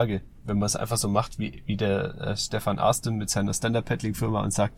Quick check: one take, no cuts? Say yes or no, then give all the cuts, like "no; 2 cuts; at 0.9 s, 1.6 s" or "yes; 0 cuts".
yes; 0 cuts